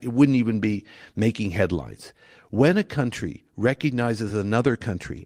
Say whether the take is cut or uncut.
uncut